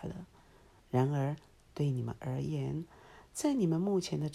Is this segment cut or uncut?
uncut